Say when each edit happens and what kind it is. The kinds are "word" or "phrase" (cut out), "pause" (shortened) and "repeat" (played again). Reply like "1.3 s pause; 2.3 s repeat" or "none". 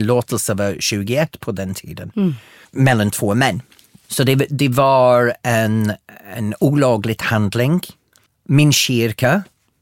none